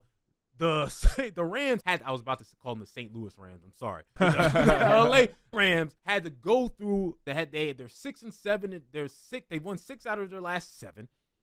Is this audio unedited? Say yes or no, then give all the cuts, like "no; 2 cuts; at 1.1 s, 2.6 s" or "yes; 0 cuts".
no; 5 cuts; at 1.8 s, 4.2 s, 5.5 s, 6.0 s, 7.3 s